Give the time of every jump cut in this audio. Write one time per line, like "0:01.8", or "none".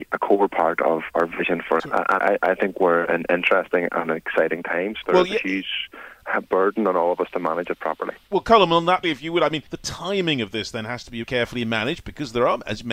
0:01.8
0:02.2
0:05.0
0:08.2
0:09.0
0:09.7
0:11.2